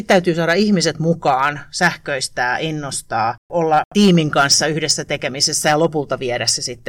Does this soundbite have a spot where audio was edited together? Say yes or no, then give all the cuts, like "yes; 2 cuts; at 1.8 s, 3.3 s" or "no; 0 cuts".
no; 0 cuts